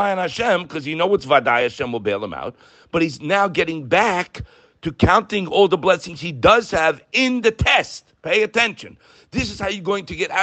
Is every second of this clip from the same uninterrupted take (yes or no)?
yes